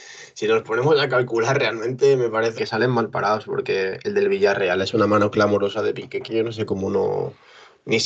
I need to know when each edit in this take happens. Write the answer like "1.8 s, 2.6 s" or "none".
2.6 s